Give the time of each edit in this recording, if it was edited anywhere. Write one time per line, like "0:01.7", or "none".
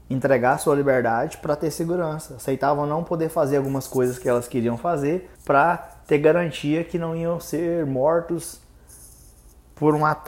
0:05.4